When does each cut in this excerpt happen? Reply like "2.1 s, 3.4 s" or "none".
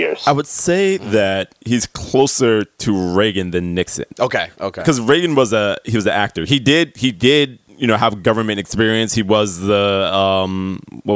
1.6 s, 4.5 s